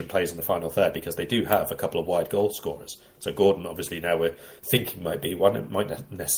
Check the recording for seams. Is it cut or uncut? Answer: uncut